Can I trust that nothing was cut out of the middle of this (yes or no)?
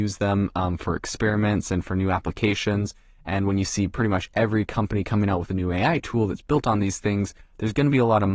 yes